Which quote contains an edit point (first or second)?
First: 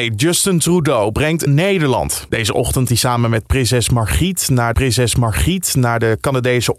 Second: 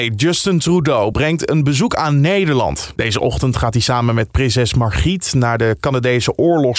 first